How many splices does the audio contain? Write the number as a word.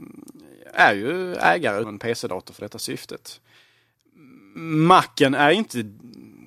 one